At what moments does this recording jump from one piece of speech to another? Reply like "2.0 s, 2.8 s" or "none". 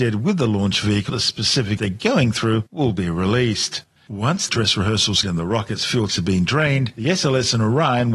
1.1 s, 1.8 s, 4.0 s, 4.5 s, 5.2 s, 6.1 s